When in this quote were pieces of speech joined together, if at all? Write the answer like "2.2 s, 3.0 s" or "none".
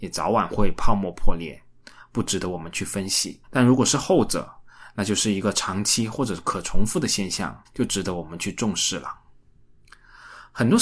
3.4 s, 7.6 s